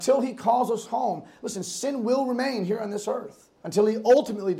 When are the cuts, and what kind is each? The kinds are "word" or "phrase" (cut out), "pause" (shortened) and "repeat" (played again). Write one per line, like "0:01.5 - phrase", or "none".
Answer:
0:03.5 - pause